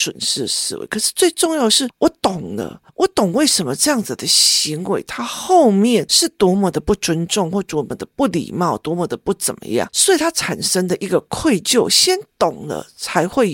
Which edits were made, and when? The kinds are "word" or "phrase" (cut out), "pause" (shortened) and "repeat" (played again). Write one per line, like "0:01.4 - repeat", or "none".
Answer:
0:02.9 - pause